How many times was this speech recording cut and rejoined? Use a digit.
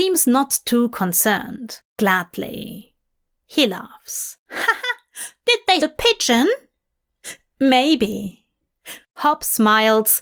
1